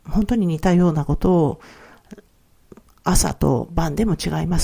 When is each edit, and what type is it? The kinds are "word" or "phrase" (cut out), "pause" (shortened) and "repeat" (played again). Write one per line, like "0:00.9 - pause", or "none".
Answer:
none